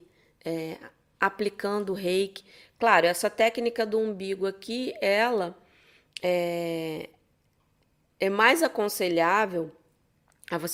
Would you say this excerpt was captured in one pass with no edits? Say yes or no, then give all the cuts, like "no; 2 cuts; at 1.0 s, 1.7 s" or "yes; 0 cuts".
yes; 0 cuts